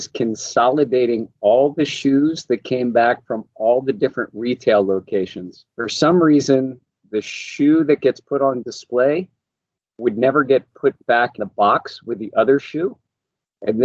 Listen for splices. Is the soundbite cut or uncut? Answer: cut